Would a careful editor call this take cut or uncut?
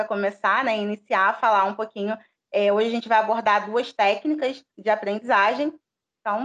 cut